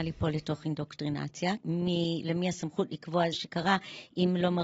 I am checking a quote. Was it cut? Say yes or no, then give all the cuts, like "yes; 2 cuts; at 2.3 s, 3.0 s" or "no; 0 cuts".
yes; 2 cuts; at 1.6 s, 3.3 s